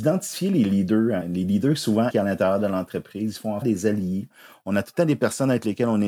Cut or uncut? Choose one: cut